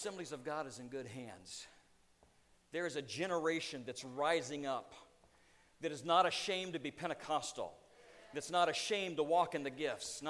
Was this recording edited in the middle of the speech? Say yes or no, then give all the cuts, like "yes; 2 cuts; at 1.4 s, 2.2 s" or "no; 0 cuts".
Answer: no; 0 cuts